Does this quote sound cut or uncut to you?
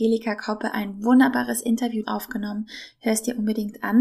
cut